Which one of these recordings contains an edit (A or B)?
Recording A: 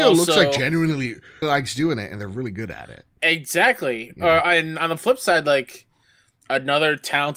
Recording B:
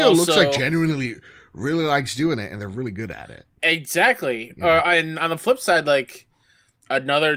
A